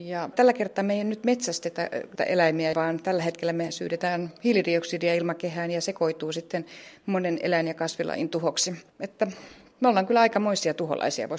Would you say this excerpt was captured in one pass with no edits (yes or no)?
no